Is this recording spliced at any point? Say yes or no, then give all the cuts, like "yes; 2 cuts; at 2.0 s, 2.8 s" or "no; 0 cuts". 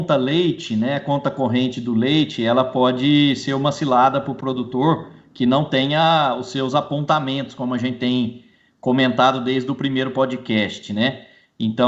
no; 0 cuts